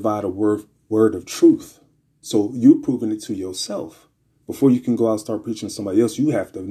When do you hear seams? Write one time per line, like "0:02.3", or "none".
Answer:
none